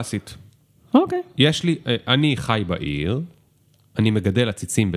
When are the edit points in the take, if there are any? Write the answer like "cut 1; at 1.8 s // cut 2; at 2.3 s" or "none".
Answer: none